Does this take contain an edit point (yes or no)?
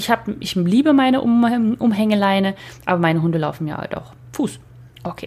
no